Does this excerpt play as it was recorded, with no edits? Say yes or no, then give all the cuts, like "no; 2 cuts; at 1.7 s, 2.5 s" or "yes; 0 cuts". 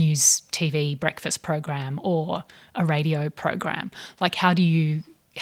yes; 0 cuts